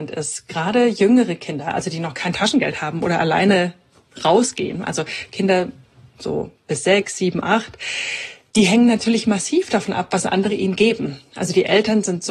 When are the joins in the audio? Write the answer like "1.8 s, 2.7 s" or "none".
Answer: none